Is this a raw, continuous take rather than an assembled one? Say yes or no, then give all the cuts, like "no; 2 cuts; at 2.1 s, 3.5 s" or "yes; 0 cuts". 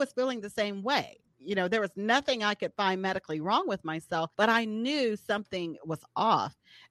no; 1 cut; at 4.3 s